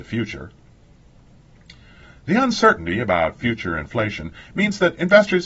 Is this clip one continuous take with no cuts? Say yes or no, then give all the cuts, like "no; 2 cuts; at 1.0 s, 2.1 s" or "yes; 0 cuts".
yes; 0 cuts